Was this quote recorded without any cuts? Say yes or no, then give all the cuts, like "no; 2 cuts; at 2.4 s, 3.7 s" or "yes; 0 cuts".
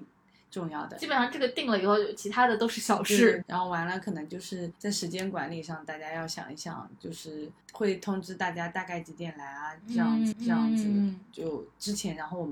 no; 4 cuts; at 3.4 s, 4.8 s, 7.6 s, 10.3 s